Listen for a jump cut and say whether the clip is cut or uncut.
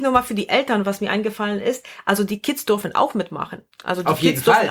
cut